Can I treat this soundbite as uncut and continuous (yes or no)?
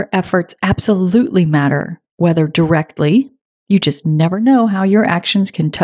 yes